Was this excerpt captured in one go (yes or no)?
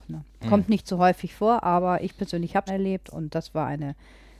no